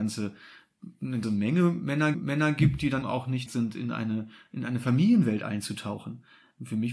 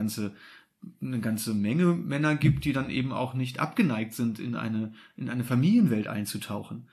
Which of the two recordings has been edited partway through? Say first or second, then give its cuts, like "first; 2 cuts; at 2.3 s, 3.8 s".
first; 4 cuts; at 1.2 s, 2.1 s, 3.0 s, 3.5 s